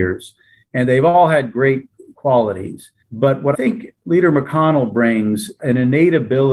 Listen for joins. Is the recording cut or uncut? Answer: cut